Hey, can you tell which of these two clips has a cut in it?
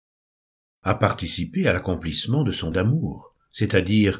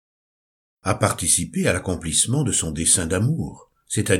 first; 1 cut; at 2.7 s

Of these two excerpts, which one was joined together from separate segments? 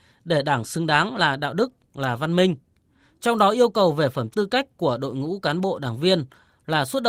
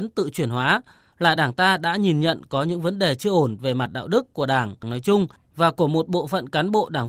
first; 1 cut; at 4.3 s

